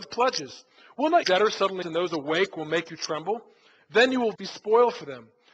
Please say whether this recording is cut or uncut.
cut